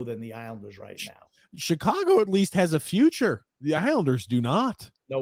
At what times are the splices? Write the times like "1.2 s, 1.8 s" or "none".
none

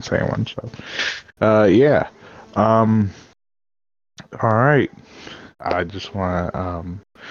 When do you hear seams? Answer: 1.3 s, 5.5 s

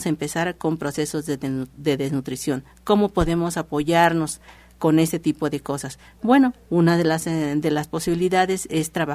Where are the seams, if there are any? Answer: none

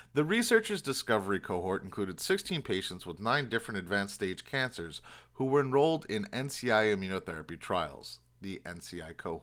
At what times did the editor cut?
none

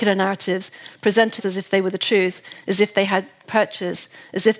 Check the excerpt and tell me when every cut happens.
1.4 s, 3.4 s

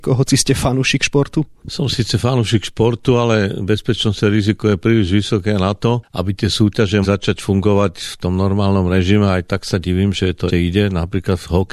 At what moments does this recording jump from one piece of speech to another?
7.0 s, 10.5 s

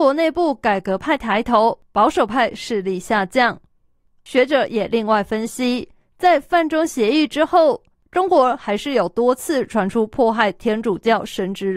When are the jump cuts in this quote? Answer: none

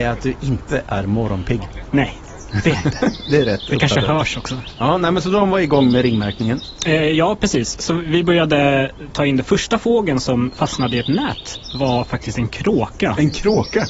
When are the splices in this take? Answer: none

